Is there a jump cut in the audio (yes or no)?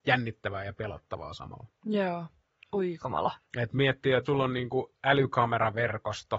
yes